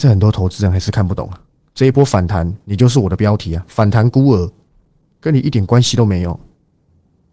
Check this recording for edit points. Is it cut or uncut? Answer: uncut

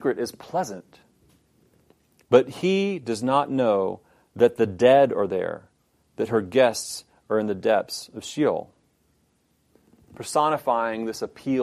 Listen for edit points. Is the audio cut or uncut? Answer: uncut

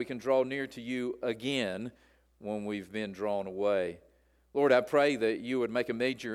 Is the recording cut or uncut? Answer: uncut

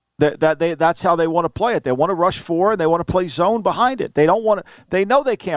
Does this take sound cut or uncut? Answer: uncut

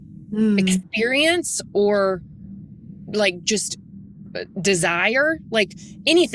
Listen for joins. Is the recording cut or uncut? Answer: uncut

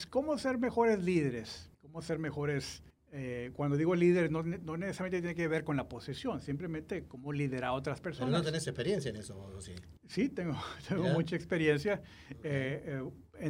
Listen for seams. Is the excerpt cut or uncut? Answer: cut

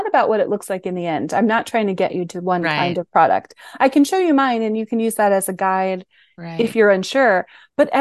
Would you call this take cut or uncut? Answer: uncut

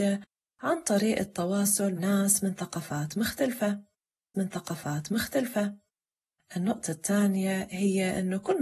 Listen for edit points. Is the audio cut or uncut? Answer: cut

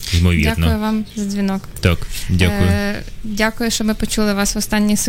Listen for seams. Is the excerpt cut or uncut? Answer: uncut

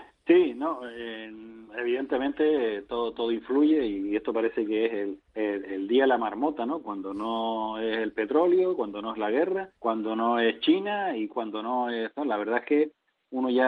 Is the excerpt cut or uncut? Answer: cut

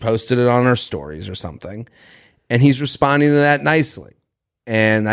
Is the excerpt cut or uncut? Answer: uncut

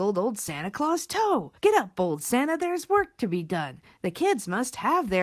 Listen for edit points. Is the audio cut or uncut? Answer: cut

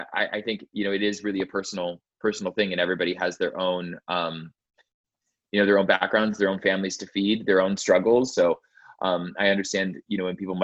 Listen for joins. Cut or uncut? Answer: uncut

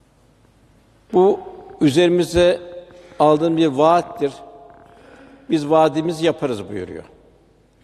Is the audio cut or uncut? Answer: uncut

